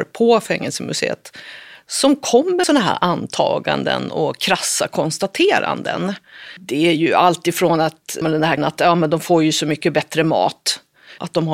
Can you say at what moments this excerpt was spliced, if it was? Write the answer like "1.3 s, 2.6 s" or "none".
2.6 s, 8.2 s, 8.6 s